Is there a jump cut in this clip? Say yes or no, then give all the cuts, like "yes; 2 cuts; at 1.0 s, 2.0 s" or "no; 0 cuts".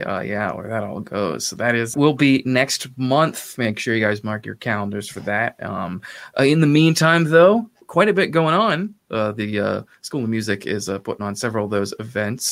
yes; 2 cuts; at 1.9 s, 7.8 s